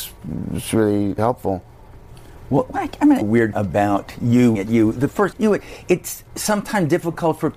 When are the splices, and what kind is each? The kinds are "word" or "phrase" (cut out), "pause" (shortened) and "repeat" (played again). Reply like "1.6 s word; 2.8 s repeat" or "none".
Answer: 1.2 s word; 3.2 s phrase; 3.5 s word; 4.5 s word; 5.3 s word; 6.3 s pause